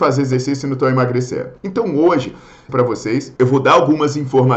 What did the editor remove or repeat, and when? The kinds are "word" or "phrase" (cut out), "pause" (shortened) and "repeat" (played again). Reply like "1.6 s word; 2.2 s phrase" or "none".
1.6 s pause; 2.7 s phrase; 3.4 s pause